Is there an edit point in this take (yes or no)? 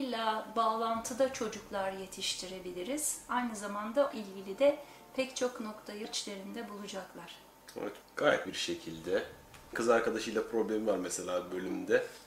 yes